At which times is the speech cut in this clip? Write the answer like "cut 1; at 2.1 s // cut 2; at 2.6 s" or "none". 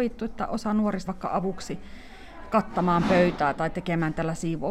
cut 1; at 1.1 s